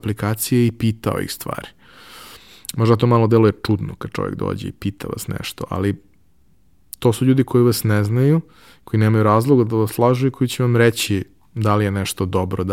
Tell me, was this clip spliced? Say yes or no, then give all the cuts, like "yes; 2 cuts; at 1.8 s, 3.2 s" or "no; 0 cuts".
no; 0 cuts